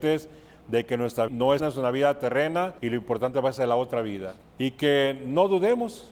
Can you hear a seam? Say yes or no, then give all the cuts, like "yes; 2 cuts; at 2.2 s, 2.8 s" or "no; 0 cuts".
yes; 4 cuts; at 1.3 s, 1.6 s, 2.8 s, 4.4 s